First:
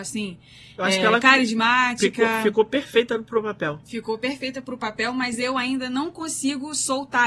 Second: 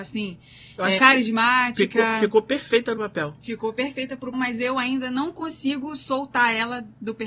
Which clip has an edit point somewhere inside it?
second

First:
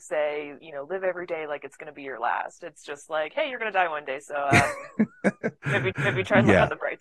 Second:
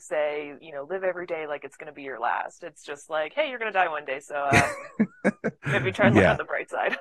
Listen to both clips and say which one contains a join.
first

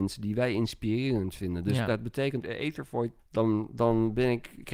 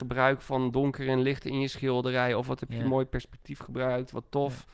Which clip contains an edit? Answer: first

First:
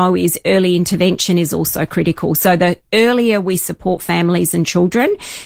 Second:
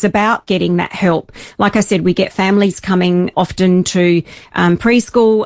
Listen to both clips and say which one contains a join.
second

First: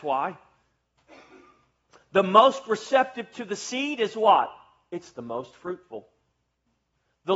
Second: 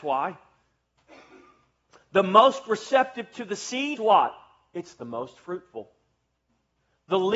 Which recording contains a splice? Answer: second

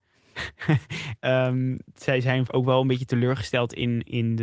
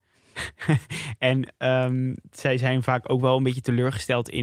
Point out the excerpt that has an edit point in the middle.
first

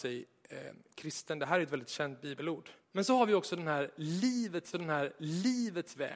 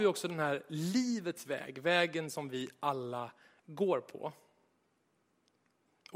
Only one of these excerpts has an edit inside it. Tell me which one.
first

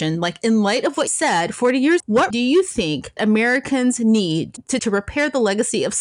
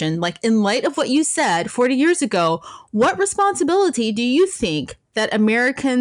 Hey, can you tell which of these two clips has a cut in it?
first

